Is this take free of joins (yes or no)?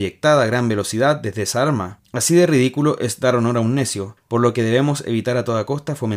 yes